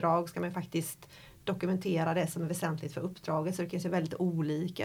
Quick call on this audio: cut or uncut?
uncut